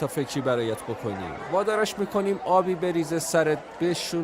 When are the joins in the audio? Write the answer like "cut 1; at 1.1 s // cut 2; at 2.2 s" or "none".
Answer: none